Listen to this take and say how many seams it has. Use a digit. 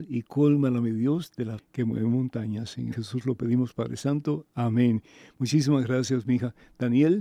2